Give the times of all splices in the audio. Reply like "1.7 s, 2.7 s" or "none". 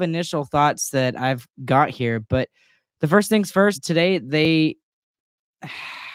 3.7 s